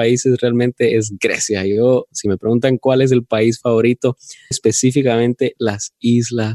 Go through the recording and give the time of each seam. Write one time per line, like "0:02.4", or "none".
0:04.5